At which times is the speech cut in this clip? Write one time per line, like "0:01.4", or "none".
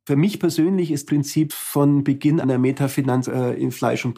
0:01.1
0:02.4
0:03.2